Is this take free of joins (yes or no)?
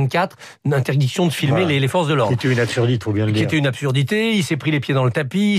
no